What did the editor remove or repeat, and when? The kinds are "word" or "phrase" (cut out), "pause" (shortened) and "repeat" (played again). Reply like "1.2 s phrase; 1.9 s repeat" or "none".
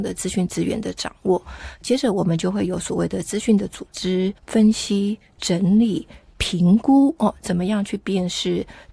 4.4 s pause